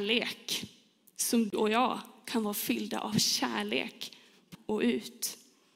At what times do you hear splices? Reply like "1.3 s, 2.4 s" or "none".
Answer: 1.5 s, 4.5 s